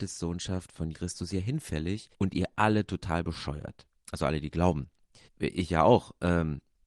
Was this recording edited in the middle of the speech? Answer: yes; 4 cuts; at 0.9 s, 2.1 s, 3.9 s, 5.2 s

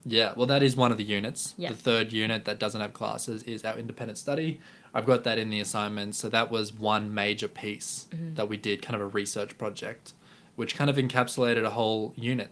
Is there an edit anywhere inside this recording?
no; 0 cuts

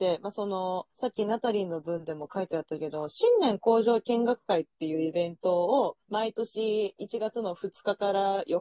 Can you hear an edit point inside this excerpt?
yes; 2 cuts; at 0.9 s, 6.0 s

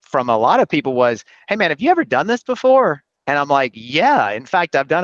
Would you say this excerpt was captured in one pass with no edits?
yes; 0 cuts

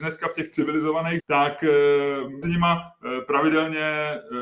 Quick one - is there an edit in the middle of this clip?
yes; 2 cuts; at 1.2 s, 2.4 s

